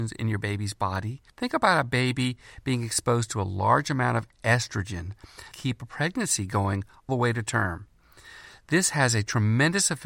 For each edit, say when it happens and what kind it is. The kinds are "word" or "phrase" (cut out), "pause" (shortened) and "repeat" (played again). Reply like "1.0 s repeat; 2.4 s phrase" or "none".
1.3 s pause; 5.5 s phrase; 7.1 s word